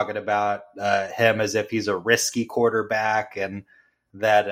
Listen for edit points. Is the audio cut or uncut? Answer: uncut